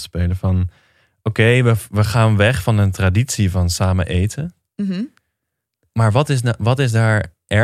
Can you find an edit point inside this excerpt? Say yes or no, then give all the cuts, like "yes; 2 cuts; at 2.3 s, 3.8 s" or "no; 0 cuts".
no; 0 cuts